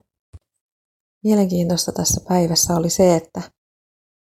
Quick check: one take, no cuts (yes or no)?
yes